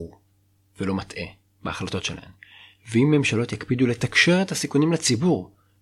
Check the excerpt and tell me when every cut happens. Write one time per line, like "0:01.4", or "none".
none